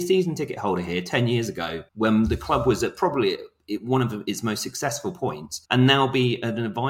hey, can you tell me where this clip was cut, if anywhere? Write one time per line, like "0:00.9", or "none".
0:01.9
0:05.6